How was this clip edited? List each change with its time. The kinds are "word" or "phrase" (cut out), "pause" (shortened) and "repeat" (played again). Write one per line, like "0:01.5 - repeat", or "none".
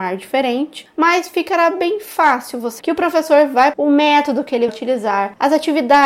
0:02.8 - word
0:03.7 - phrase
0:04.7 - word